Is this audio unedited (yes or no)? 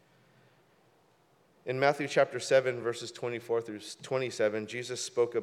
yes